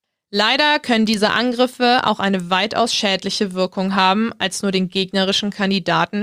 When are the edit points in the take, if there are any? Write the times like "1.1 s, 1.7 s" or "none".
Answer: none

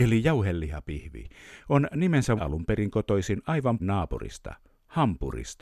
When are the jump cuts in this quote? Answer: 2.4 s, 3.8 s

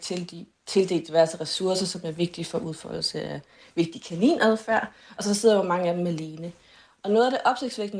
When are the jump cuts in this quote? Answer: none

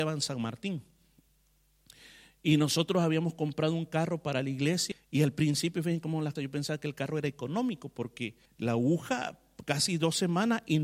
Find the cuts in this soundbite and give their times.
4.9 s, 6.4 s, 8.5 s

